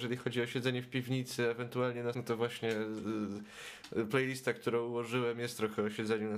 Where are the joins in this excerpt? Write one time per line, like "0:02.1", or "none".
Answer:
0:02.1